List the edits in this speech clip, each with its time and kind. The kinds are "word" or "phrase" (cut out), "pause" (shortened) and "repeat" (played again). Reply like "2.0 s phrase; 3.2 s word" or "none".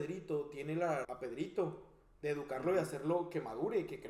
1.0 s phrase